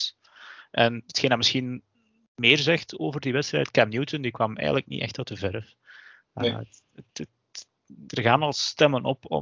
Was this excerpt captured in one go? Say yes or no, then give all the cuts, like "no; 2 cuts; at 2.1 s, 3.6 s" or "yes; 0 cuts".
no; 1 cut; at 8.1 s